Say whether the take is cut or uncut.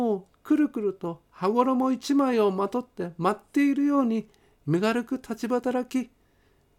uncut